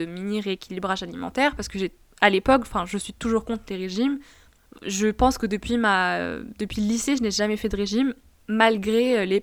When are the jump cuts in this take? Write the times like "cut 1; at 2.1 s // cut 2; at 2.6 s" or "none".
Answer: none